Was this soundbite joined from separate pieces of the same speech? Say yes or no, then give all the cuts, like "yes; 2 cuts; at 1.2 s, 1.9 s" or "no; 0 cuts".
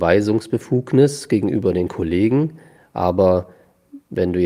no; 0 cuts